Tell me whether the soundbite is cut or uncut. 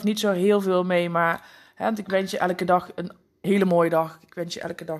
uncut